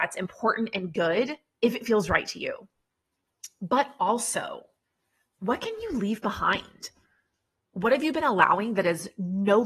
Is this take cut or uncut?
uncut